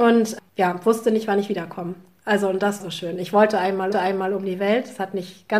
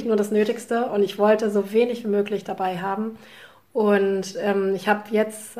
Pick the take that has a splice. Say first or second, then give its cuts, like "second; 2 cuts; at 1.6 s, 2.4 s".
first; 2 cuts; at 2.8 s, 3.9 s